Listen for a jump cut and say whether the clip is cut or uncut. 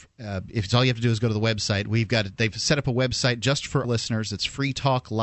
cut